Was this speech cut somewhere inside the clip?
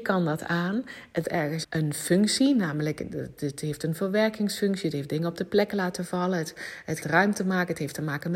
yes; 3 cuts; at 1.2 s, 1.6 s, 7.0 s

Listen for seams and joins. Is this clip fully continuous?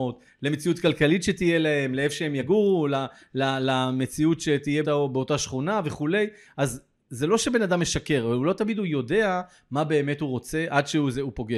no; 1 cut; at 4.8 s

